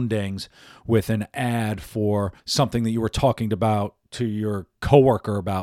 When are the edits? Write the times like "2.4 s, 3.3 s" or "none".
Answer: 2.4 s, 4.0 s